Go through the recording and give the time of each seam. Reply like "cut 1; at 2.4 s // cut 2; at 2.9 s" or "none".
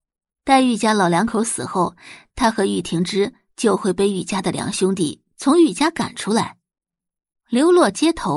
none